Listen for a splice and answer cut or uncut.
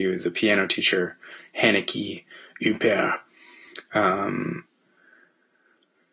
uncut